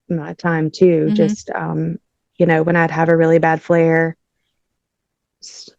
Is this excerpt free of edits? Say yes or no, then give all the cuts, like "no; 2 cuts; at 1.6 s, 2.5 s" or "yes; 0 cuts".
yes; 0 cuts